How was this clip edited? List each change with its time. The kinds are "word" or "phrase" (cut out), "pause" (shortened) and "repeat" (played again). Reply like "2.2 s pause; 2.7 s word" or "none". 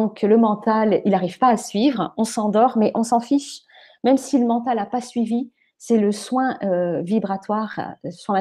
none